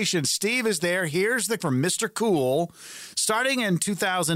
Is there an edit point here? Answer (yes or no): yes